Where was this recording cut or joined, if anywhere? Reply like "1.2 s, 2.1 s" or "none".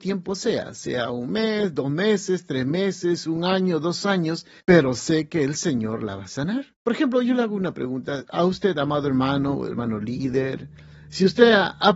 4.6 s, 6.8 s